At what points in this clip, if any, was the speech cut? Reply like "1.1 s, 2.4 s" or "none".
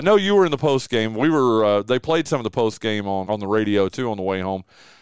3.2 s